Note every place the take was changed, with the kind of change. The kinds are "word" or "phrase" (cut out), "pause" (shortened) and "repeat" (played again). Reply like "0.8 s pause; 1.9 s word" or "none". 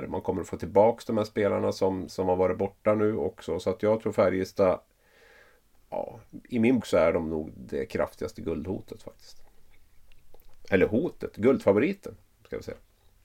2.1 s word; 6.8 s word; 7.5 s word